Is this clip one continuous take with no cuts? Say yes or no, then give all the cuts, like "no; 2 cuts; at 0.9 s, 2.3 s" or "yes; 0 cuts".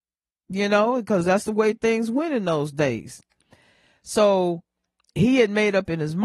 yes; 0 cuts